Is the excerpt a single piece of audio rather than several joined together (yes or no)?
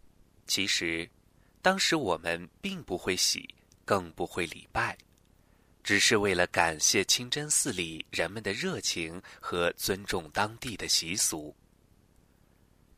yes